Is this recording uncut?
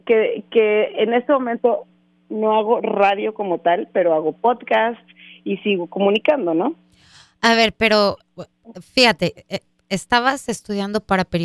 yes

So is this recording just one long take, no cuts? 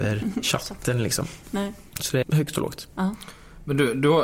no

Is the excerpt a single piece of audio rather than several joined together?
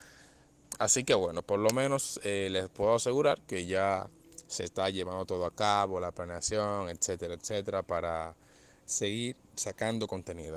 yes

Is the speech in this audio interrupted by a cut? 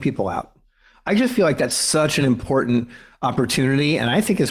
no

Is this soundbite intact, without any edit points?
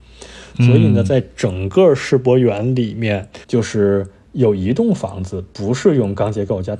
no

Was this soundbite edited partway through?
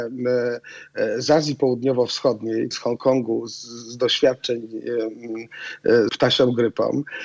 yes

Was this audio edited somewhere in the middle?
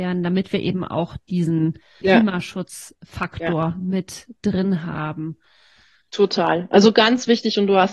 yes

